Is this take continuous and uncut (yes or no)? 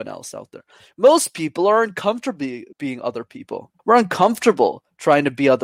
no